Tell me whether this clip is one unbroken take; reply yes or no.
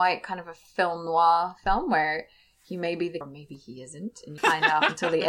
no